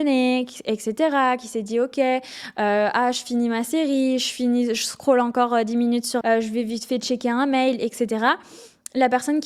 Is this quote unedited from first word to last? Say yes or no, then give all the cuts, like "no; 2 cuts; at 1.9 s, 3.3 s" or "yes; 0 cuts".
no; 1 cut; at 6.2 s